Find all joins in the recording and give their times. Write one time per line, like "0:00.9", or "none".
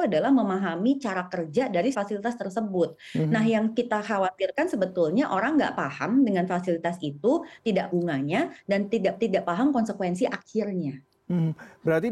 0:01.9
0:07.9
0:09.2